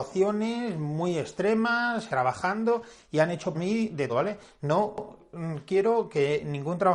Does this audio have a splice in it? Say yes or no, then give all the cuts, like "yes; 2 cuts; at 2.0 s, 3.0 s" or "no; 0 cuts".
yes; 3 cuts; at 2.1 s, 3.5 s, 4.1 s